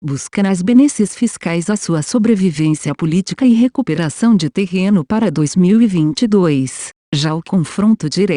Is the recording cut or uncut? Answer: uncut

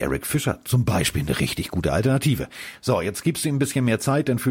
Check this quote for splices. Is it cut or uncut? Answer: uncut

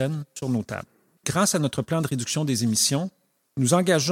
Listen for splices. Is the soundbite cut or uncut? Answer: uncut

